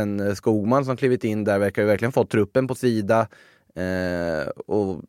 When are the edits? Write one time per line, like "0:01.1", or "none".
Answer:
0:02.8

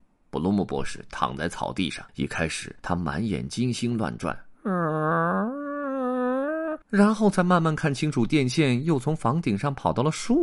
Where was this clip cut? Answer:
0:02.1
0:02.8
0:06.8

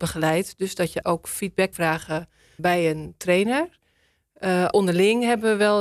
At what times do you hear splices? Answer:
0:01.0
0:01.7
0:02.6
0:04.7

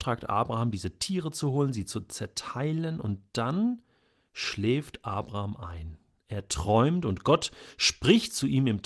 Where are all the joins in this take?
none

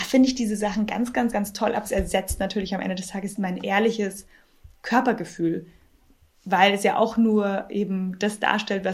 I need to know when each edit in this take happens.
0:01.3
0:03.3

